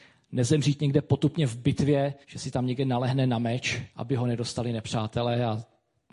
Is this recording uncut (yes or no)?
no